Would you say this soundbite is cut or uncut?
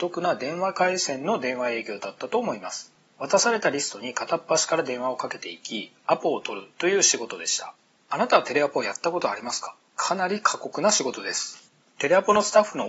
uncut